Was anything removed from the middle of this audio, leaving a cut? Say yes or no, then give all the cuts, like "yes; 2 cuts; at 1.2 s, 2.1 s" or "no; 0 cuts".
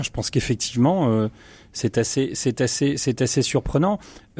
no; 0 cuts